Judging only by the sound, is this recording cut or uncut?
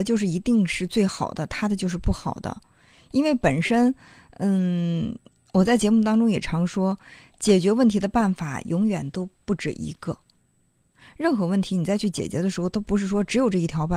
uncut